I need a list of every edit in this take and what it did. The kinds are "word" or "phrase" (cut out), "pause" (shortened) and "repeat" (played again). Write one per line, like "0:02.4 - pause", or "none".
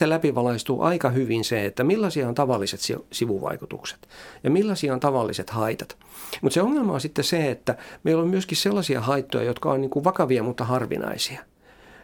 none

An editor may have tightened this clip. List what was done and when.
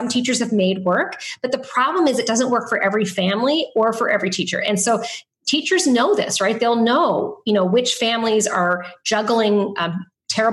none

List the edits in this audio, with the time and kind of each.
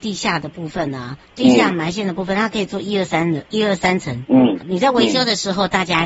0:01.3 - word
0:03.5 - pause
0:04.6 - word

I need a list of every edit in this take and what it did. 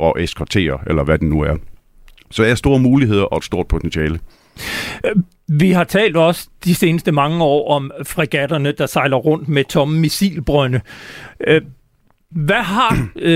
0:02.6 - word

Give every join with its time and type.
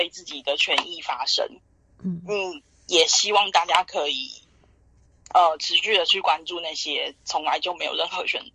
none

